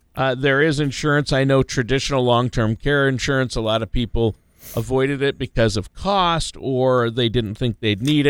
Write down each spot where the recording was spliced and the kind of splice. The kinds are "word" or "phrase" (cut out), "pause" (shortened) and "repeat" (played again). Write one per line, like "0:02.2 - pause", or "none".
none